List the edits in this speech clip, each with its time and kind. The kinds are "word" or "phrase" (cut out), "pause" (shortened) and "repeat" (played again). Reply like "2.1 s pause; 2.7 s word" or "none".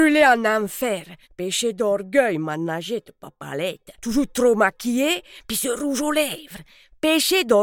1.2 s pause; 3.9 s pause